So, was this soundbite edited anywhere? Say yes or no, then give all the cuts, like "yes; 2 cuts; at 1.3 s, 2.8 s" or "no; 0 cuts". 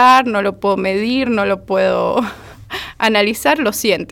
no; 0 cuts